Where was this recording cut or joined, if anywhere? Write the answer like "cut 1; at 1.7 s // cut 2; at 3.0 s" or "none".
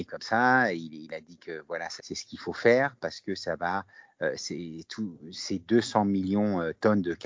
cut 1; at 2.0 s